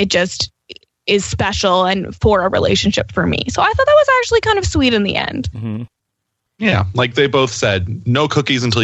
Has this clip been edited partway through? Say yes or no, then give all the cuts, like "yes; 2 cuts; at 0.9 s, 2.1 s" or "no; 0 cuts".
no; 0 cuts